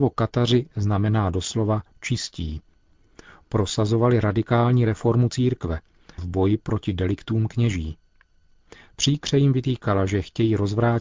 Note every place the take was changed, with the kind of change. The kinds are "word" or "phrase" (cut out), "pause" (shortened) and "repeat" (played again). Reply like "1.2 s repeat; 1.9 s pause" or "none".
6.2 s word